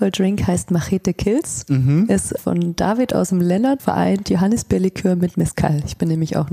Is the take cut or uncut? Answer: cut